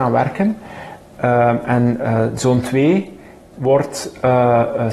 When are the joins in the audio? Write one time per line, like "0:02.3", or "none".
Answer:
none